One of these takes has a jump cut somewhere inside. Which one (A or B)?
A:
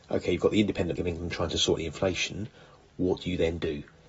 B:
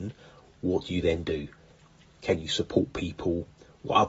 A